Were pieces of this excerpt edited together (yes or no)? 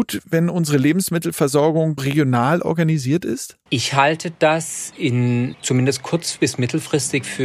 yes